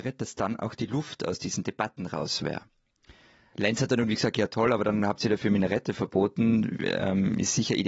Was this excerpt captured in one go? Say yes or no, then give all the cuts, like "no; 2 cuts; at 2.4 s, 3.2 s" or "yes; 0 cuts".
yes; 0 cuts